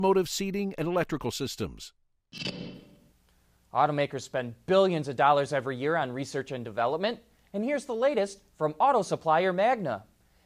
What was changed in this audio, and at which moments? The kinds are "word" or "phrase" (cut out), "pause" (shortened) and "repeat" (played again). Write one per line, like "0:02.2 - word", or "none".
none